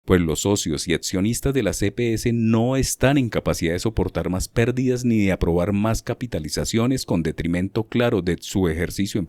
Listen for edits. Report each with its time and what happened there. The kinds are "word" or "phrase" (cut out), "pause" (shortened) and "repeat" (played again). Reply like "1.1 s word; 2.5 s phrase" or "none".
none